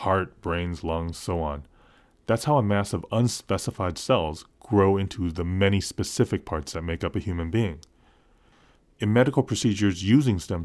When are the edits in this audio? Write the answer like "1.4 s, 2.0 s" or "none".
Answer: none